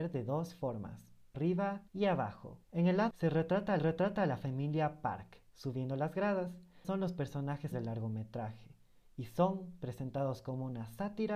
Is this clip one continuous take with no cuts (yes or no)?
no